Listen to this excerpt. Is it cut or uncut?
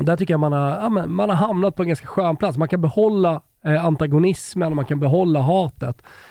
uncut